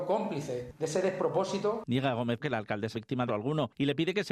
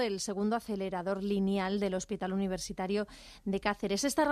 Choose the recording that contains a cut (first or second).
first